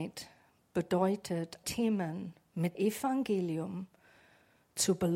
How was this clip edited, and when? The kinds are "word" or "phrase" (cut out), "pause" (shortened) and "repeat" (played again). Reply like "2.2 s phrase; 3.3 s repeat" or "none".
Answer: 1.6 s word; 2.7 s word